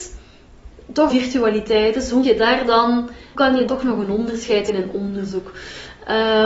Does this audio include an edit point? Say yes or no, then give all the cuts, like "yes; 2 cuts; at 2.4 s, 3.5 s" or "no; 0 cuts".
yes; 5 cuts; at 1.1 s, 2.2 s, 3.3 s, 3.7 s, 4.7 s